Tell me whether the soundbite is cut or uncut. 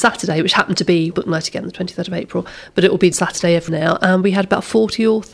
cut